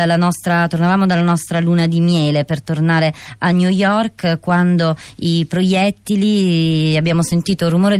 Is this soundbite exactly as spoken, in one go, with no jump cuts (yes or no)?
yes